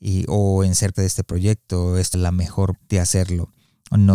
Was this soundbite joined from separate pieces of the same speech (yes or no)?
yes